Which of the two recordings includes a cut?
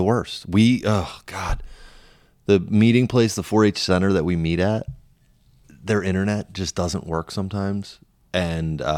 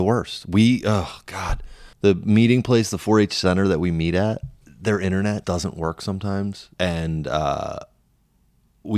second; 4 cuts; at 1.9 s, 4.6 s, 5.4 s, 6.7 s

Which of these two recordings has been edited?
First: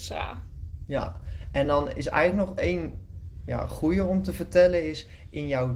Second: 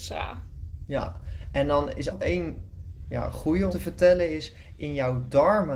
second; 2 cuts; at 2.1 s, 3.7 s

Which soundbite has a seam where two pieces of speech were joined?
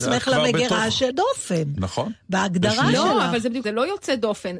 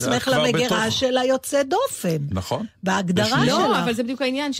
first; 2 cuts; at 1.1 s, 3.6 s

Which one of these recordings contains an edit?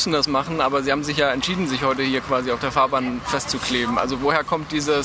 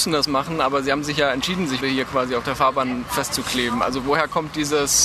second; 1 cut; at 1.8 s

